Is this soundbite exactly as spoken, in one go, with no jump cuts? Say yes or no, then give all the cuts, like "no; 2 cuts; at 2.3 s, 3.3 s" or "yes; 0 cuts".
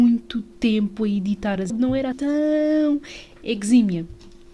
no; 2 cuts; at 1.7 s, 2.1 s